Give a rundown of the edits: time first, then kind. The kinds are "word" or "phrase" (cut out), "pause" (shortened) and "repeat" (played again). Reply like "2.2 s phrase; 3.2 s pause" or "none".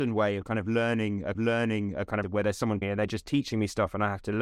1.3 s repeat; 2.2 s phrase; 2.8 s word